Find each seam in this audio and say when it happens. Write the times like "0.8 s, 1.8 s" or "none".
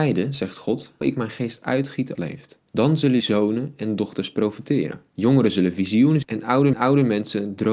1.0 s, 2.1 s, 2.7 s, 3.2 s, 5.1 s, 6.2 s, 6.7 s